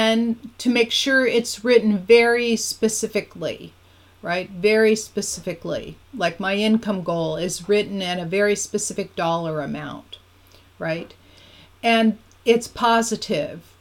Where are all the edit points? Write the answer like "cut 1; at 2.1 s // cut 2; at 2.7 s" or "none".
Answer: none